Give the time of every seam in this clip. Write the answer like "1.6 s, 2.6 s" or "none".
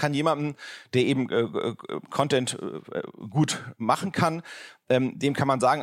none